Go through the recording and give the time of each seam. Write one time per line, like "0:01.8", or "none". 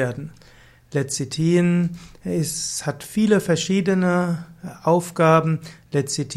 none